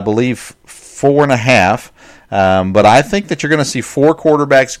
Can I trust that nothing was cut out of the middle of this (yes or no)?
yes